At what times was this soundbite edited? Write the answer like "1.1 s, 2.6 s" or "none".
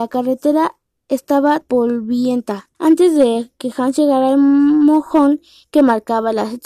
1.6 s, 2.7 s